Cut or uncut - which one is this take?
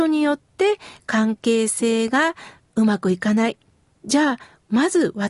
cut